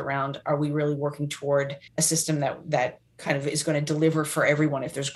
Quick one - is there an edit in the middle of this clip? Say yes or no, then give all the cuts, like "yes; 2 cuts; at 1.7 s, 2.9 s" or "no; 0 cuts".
yes; 2 cuts; at 1.9 s, 3.1 s